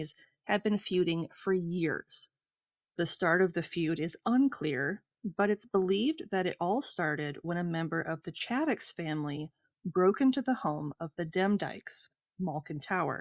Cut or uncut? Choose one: uncut